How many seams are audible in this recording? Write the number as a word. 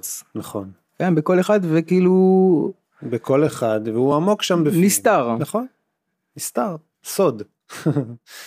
zero